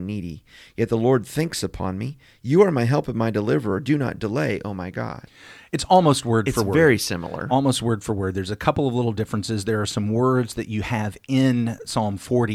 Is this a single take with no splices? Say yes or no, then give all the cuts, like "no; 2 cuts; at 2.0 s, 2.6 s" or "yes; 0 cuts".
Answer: yes; 0 cuts